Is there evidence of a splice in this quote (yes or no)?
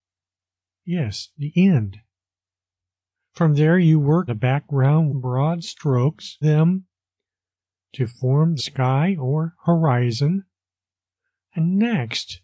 yes